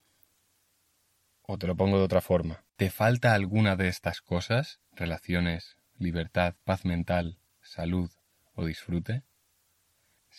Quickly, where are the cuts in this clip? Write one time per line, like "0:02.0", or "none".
0:02.7
0:04.8
0:06.6